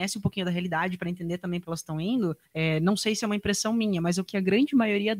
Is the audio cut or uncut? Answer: cut